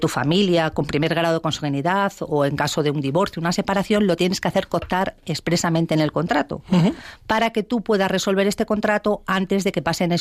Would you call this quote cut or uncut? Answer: uncut